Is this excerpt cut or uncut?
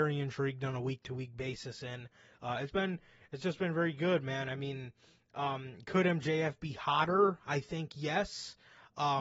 cut